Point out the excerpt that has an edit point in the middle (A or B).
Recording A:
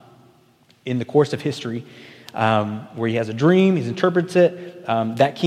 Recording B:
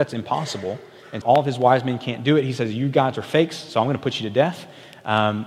B